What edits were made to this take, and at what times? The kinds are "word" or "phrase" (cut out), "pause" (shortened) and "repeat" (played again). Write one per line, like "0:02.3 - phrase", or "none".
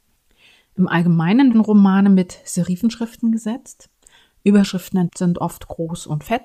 0:01.5 - word
0:05.1 - word